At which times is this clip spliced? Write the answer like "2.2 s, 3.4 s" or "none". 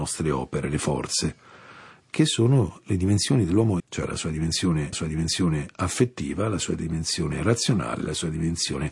3.8 s, 4.9 s